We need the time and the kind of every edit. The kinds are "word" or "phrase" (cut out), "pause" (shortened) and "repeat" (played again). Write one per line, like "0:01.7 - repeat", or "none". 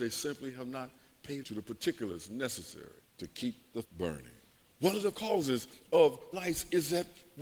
0:01.4 - word
0:03.1 - pause
0:03.8 - word
0:04.5 - pause
0:05.1 - word
0:06.3 - word

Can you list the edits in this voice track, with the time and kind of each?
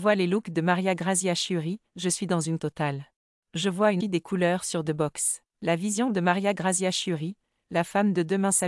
0:01.9 - pause
0:02.6 - word
0:03.2 - pause
0:04.0 - word
0:04.9 - phrase
0:05.5 - pause

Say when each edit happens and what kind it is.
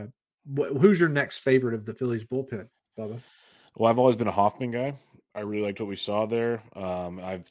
none

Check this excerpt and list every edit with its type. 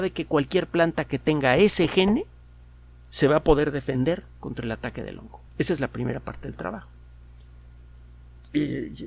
0:05.5 - pause

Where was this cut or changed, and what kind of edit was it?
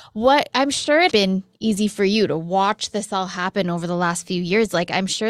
0:01.1 - word

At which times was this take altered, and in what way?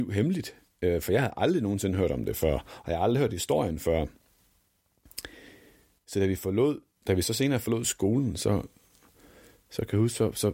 none

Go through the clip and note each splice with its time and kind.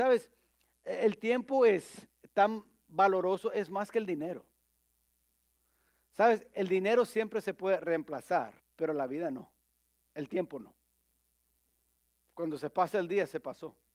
0:08.6 - pause

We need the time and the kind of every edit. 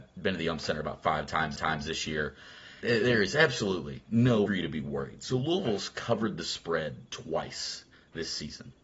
0:01.6 - repeat
0:02.8 - word
0:04.5 - phrase
0:07.9 - pause

